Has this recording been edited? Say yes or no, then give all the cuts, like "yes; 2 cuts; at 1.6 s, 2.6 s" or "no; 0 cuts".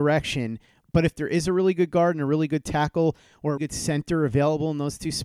yes; 1 cut; at 3.6 s